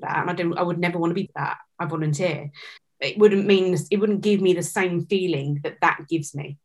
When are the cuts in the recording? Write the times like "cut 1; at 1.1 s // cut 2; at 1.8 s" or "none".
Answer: cut 1; at 1.3 s // cut 2; at 2.8 s